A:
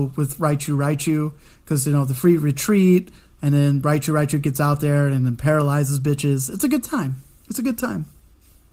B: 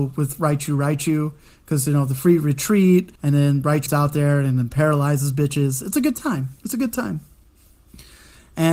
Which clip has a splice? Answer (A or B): B